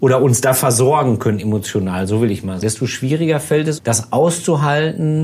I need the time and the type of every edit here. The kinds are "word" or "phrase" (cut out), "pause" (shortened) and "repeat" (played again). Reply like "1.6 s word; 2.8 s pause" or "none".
2.6 s word; 3.8 s word